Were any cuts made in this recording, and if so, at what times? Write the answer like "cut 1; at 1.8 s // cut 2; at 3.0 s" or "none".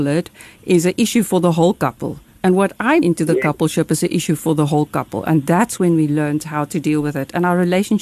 cut 1; at 3.0 s

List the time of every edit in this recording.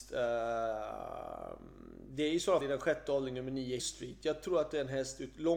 cut 1; at 2.6 s // cut 2; at 3.8 s

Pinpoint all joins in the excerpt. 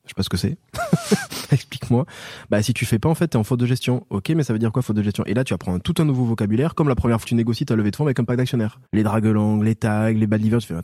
cut 1; at 7.2 s // cut 2; at 8.9 s

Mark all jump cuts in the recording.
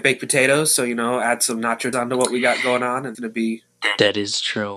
cut 1; at 1.9 s // cut 2; at 3.1 s

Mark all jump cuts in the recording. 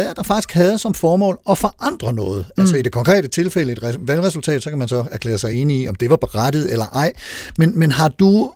none

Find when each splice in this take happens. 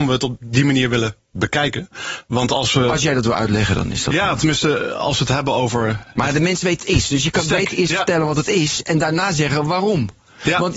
cut 1; at 6.8 s

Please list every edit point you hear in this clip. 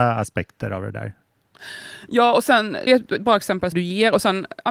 cut 1; at 2.9 s // cut 2; at 3.7 s

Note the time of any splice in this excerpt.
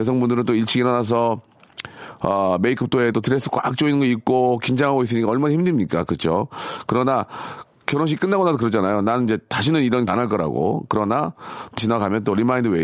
cut 1; at 3.1 s // cut 2; at 7.7 s // cut 3; at 10.1 s // cut 4; at 11.8 s

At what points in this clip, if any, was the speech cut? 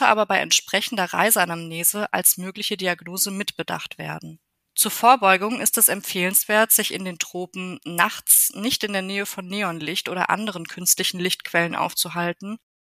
cut 1; at 4.7 s

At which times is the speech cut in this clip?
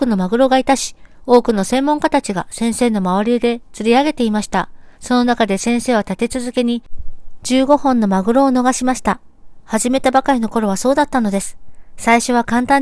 cut 1; at 4.9 s

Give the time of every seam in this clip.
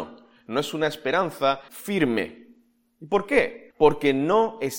cut 1; at 1.7 s // cut 2; at 3.7 s

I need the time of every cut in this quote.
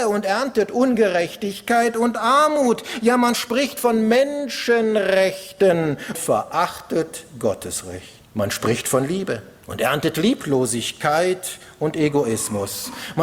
cut 1; at 6.1 s

